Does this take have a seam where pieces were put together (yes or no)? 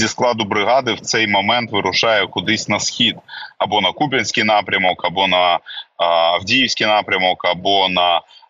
no